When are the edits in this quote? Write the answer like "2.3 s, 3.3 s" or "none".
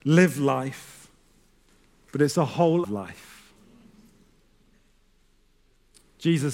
2.8 s